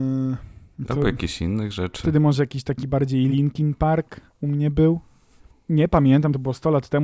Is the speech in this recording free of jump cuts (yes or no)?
yes